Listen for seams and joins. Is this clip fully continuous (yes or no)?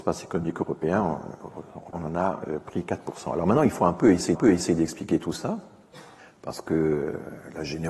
no